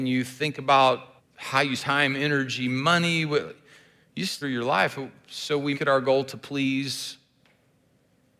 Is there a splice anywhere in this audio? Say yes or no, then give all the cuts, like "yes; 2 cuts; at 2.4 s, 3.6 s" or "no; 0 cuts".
yes; 4 cuts; at 1.2 s, 1.8 s, 4.4 s, 5.7 s